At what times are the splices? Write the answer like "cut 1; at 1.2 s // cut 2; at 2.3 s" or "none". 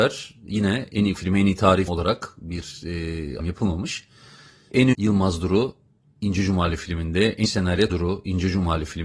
cut 1; at 1.2 s // cut 2; at 1.9 s // cut 3; at 3.4 s // cut 4; at 4.9 s // cut 5; at 7.4 s // cut 6; at 7.9 s